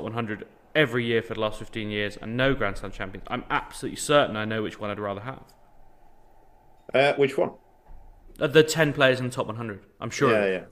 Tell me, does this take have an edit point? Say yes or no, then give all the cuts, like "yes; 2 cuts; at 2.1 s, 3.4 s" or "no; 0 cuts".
no; 0 cuts